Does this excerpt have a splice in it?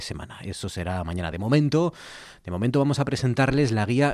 no; 0 cuts

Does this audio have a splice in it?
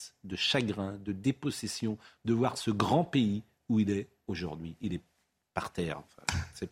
no; 0 cuts

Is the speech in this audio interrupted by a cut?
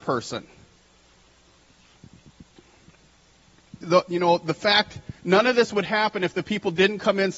yes; 1 cut; at 5.2 s

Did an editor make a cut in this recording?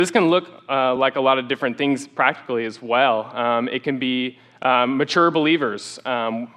no; 0 cuts

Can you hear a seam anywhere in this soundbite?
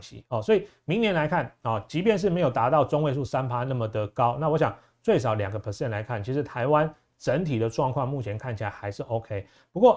no; 0 cuts

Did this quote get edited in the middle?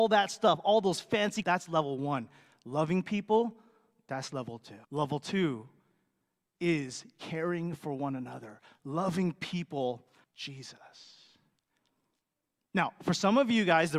yes; 3 cuts; at 1.4 s, 4.8 s, 10.2 s

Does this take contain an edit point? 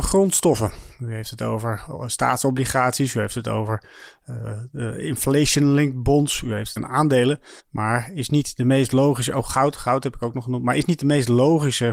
yes; 2 cuts; at 6.8 s, 7.6 s

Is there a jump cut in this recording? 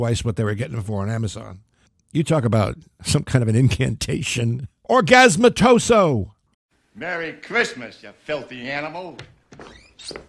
no; 0 cuts

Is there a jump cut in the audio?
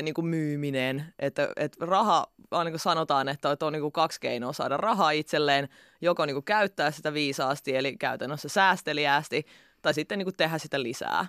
no; 0 cuts

